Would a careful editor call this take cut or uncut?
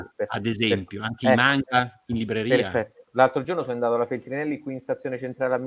uncut